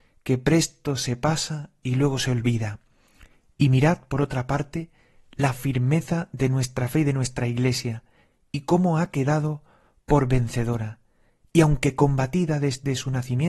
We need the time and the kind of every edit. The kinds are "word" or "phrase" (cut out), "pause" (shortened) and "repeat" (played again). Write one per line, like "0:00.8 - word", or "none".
none